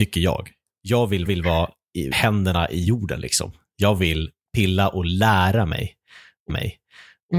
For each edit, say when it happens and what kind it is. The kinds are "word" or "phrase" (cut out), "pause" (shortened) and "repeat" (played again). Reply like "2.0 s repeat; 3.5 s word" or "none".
1.3 s repeat; 2.1 s word; 6.5 s repeat